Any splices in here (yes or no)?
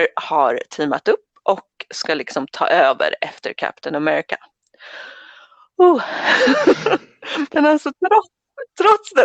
no